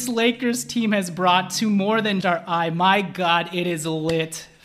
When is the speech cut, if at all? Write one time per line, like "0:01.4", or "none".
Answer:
0:02.2

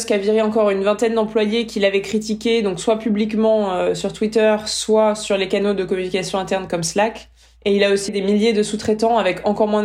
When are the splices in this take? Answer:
0:08.1

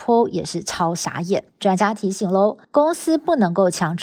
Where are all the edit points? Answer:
0:01.5
0:02.6

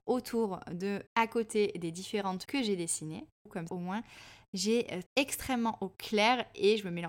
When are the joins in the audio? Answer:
0:01.1
0:02.4
0:03.7
0:05.1

